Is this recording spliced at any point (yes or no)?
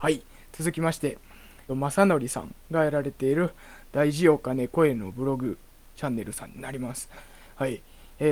yes